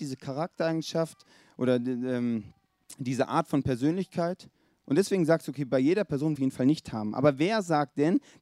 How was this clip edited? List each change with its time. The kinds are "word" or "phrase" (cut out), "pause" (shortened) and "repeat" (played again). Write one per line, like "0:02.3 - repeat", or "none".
0:06.4 - phrase